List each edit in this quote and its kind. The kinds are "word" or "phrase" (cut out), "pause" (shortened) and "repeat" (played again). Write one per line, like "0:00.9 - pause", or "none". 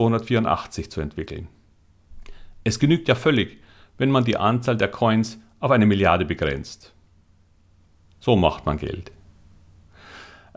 none